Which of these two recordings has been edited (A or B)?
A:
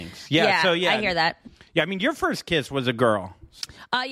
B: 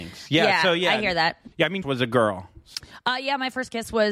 B